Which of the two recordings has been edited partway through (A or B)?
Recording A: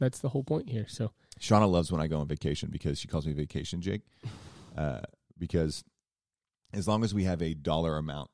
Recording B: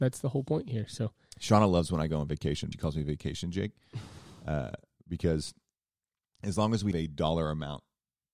B